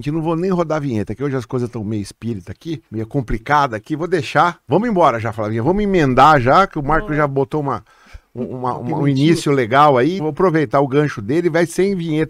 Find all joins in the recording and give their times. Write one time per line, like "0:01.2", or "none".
0:02.9
0:04.6
0:10.2